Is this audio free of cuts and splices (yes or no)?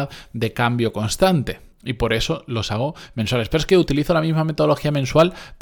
no